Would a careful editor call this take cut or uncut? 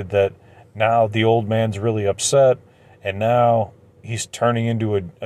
uncut